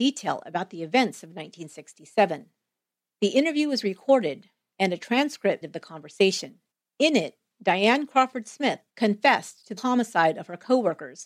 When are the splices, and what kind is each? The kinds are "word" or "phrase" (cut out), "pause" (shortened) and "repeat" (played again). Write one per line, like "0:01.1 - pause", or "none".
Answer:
0:05.6 - word
0:06.7 - pause
0:08.9 - pause
0:09.8 - word